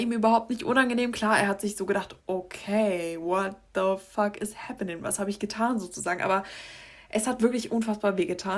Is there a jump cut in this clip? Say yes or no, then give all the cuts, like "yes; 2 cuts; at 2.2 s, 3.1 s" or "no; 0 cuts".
yes; 1 cut; at 2.2 s